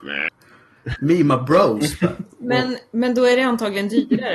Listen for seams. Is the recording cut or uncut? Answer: uncut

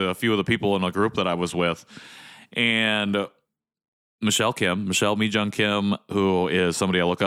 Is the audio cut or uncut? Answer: uncut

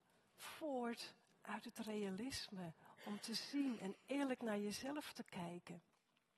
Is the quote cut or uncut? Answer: uncut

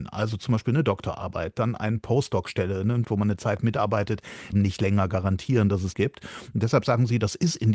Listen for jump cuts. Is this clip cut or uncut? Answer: cut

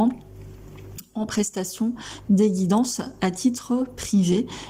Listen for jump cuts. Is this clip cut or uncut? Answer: uncut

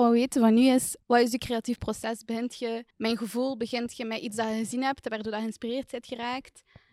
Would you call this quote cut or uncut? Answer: cut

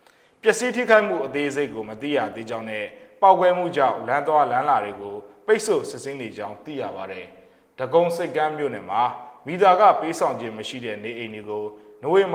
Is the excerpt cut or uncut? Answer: uncut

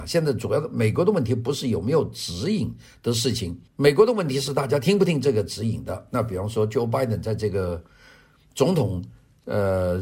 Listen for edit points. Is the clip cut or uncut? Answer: cut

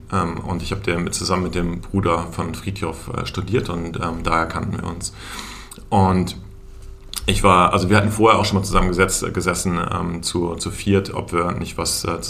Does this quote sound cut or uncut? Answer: uncut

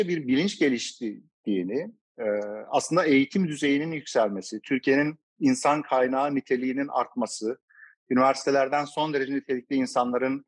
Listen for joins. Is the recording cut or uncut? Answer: uncut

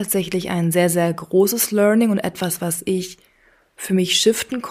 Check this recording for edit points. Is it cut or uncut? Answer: uncut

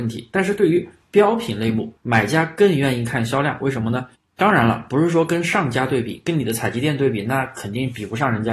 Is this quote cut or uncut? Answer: cut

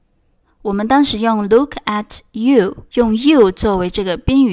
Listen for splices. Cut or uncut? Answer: cut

